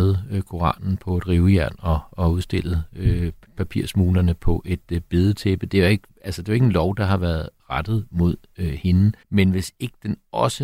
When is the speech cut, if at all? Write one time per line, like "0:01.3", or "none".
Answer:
0:06.2
0:09.2